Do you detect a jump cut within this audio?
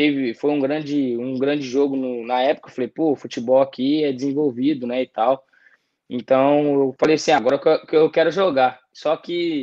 no; 0 cuts

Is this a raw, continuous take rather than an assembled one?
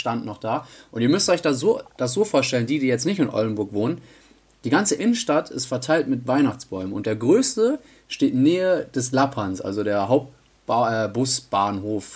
yes; 0 cuts

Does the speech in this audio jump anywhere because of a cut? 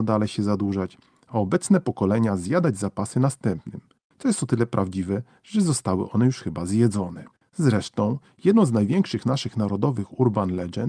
yes; 1 cut; at 7.3 s

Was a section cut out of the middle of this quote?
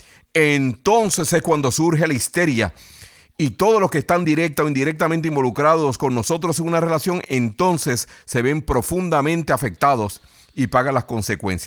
no; 0 cuts

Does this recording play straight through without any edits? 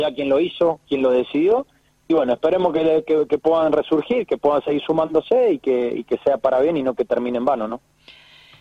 yes; 0 cuts

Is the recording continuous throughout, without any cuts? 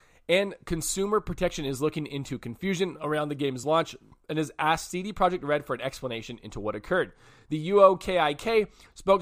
yes; 0 cuts

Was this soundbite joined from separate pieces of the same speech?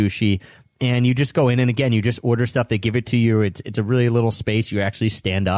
no; 0 cuts

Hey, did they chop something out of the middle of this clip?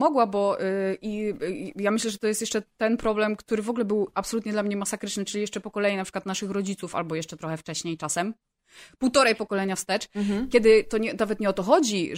no; 0 cuts

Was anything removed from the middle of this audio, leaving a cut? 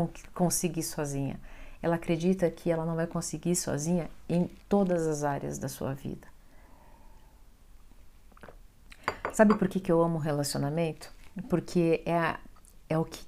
yes; 1 cut; at 4.6 s

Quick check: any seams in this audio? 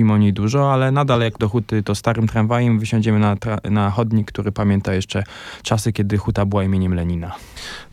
yes; 1 cut; at 1.4 s

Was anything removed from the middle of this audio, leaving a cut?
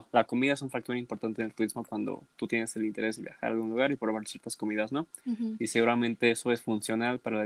yes; 1 cut; at 5.2 s

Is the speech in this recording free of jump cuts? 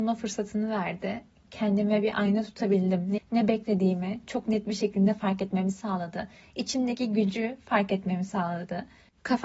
no; 1 cut; at 3.2 s

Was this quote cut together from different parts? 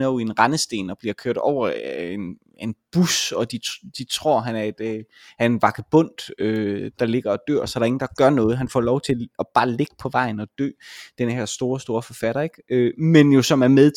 no; 0 cuts

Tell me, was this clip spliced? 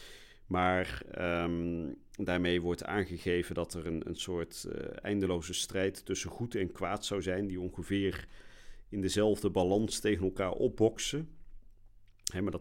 no; 0 cuts

